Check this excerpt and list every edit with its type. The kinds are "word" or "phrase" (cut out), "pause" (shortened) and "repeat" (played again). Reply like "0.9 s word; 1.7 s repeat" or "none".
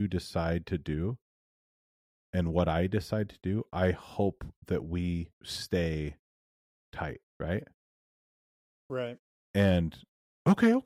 5.3 s pause; 7.3 s pause